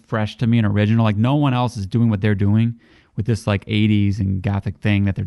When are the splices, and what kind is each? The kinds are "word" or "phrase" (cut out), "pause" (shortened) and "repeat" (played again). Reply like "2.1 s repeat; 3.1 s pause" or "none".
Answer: none